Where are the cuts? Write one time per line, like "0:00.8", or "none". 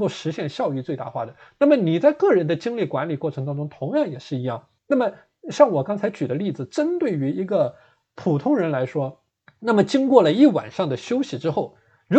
0:04.8
0:09.3